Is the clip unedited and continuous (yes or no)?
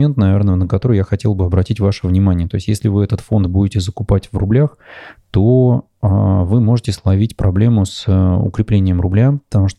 yes